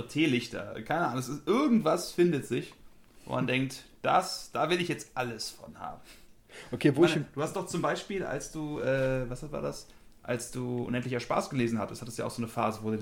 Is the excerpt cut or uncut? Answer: uncut